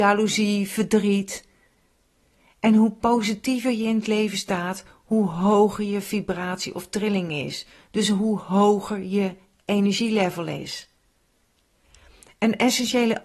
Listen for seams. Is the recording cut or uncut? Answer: uncut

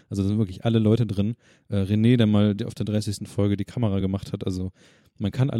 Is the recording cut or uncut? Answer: uncut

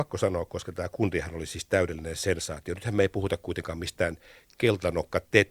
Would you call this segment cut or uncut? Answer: uncut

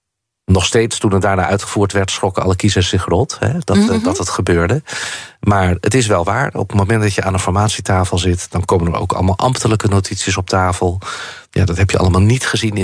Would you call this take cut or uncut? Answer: cut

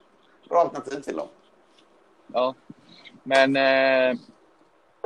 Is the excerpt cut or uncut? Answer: uncut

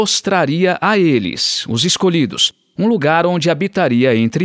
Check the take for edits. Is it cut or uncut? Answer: uncut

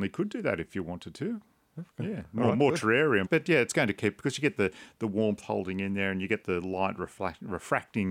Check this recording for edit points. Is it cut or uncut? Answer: cut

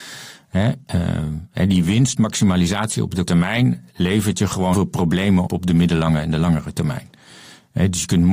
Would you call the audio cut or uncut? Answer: cut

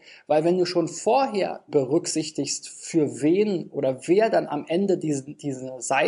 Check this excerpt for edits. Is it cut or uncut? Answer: cut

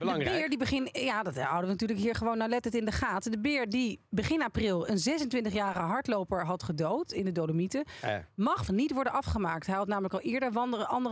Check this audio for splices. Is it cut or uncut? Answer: cut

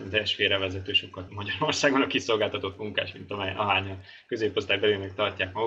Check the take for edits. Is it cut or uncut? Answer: cut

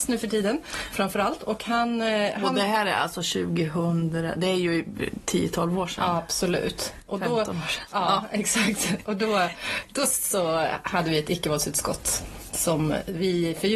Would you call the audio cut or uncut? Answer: uncut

